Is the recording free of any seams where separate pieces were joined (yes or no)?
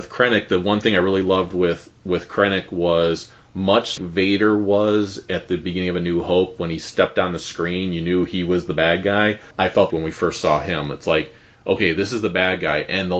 no